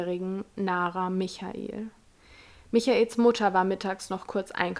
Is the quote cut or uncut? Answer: uncut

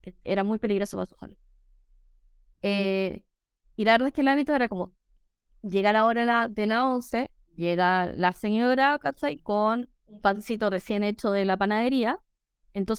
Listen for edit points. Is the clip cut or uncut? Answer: uncut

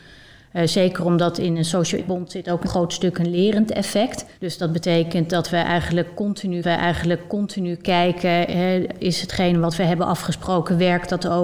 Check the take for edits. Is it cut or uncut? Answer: cut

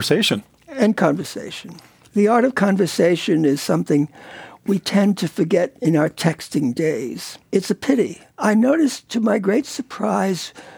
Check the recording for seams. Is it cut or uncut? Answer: cut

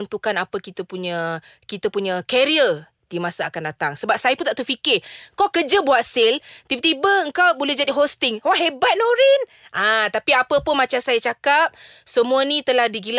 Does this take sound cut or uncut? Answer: uncut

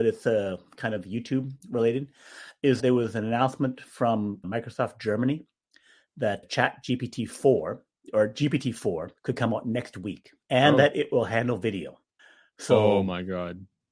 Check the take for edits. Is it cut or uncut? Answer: cut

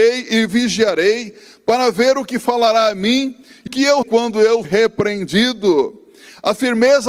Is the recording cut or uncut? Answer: cut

